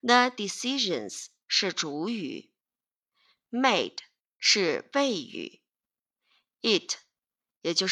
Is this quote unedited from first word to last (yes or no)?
no